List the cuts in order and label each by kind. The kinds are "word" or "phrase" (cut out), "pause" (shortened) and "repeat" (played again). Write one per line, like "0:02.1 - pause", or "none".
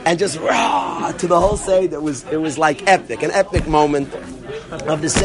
none